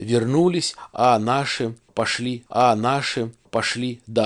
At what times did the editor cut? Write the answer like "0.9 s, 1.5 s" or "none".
2.5 s